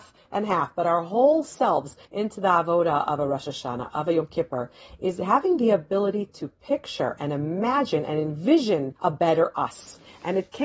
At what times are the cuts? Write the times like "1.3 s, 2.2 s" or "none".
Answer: 2.0 s, 9.0 s